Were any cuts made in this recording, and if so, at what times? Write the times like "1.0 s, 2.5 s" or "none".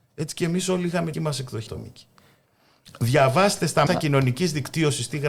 1.1 s, 1.7 s, 3.9 s